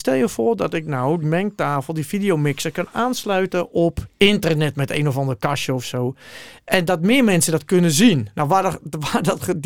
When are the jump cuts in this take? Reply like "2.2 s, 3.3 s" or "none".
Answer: 1.2 s